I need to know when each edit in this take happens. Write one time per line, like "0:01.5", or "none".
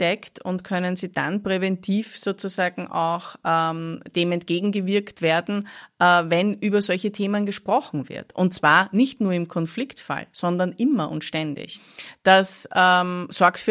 none